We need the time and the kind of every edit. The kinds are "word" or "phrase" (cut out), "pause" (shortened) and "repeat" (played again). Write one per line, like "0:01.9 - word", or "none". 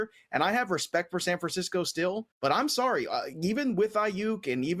0:02.3 - pause